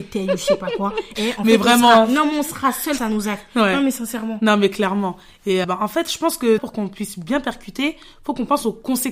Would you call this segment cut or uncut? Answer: cut